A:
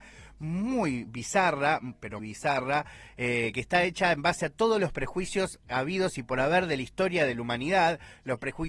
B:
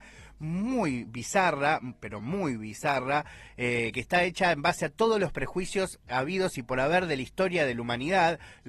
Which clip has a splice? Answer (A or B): A